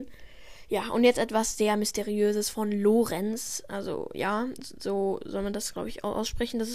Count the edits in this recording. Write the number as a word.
zero